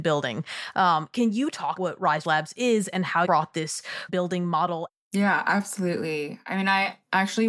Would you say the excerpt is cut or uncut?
cut